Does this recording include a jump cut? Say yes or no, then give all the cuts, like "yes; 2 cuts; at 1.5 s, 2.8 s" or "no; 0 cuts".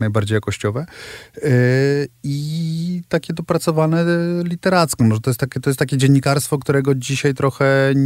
yes; 1 cut; at 5.6 s